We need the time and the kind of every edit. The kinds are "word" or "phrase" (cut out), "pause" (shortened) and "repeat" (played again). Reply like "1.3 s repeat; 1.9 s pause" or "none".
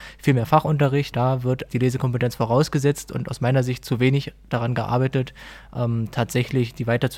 1.1 s word; 1.7 s word